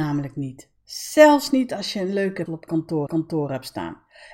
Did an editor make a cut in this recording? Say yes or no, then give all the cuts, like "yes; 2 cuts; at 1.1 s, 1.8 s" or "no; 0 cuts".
yes; 2 cuts; at 2.5 s, 3.1 s